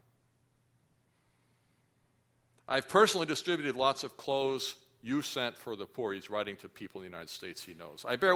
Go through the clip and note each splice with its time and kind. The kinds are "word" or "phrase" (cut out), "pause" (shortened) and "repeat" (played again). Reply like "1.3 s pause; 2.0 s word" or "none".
none